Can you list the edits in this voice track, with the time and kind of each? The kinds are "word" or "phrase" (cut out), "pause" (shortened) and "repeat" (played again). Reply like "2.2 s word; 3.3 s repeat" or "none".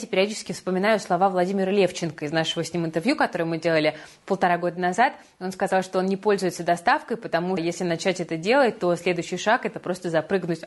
7.6 s word